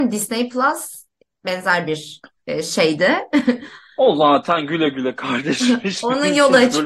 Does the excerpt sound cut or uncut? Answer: uncut